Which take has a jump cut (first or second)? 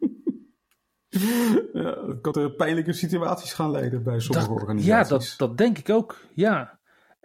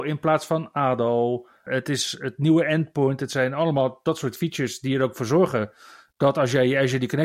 first